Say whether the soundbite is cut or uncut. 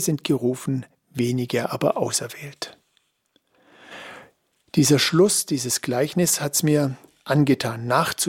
uncut